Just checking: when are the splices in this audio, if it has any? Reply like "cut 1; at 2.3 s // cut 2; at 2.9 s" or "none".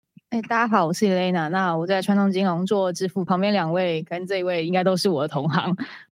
cut 1; at 3.3 s